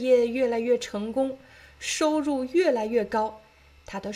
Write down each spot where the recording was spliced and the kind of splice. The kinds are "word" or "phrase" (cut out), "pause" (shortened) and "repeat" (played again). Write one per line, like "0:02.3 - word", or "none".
none